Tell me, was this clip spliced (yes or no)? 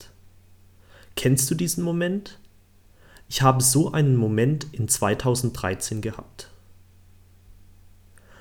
no